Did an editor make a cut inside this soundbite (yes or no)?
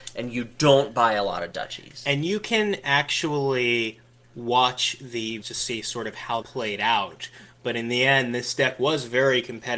yes